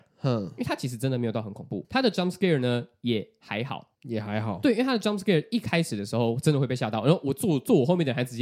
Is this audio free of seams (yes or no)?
no